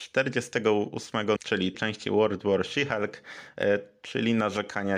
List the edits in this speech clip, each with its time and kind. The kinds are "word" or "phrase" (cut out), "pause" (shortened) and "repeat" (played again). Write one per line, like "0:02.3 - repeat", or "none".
0:01.4 - word
0:01.7 - word

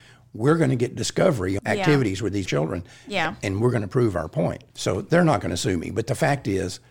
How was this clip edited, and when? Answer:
0:01.6 - phrase
0:02.5 - word
0:04.7 - pause

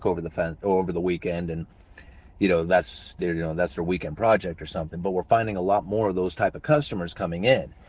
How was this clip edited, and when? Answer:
none

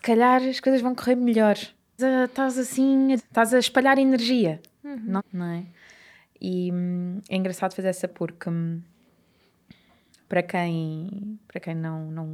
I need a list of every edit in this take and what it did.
0:02.0 - word
0:03.2 - word
0:05.2 - word
0:08.1 - word

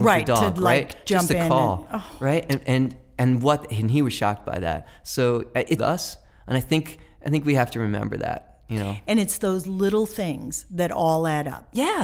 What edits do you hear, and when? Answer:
0:05.8 - phrase

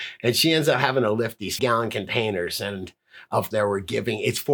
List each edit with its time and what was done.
0:01.6 - word
0:03.5 - word

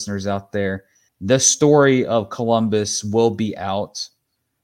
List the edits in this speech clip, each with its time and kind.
0:01.1 - pause

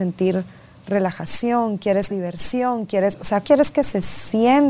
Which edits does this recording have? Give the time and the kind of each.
0:02.1 - word
0:03.4 - word

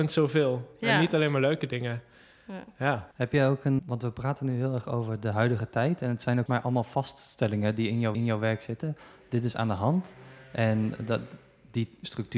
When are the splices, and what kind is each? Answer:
0:03.1 - pause
0:03.8 - word
0:06.5 - word
0:08.1 - repeat

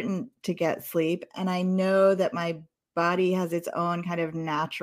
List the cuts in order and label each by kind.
none

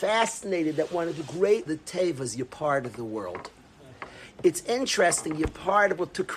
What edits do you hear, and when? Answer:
0:01.7 - phrase

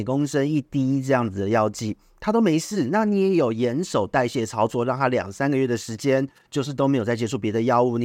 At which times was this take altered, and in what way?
none

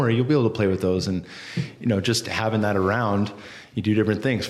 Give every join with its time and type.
none

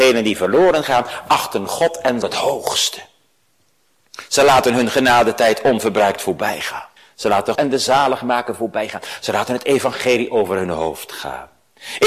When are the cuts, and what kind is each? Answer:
0:02.2 - phrase
0:07.0 - pause
0:07.5 - word

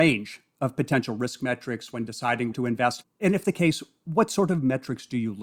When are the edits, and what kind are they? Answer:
0:02.5 - word
0:03.4 - word

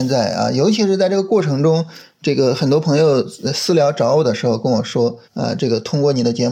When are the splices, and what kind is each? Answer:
0:05.2 - pause

